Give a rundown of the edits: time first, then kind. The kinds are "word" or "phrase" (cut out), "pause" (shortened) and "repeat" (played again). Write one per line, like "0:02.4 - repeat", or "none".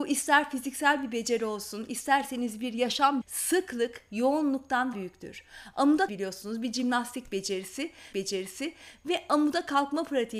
0:03.2 - word
0:04.9 - phrase
0:06.1 - phrase
0:08.1 - repeat